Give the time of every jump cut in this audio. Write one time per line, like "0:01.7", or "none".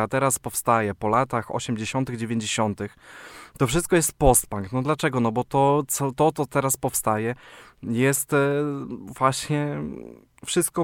none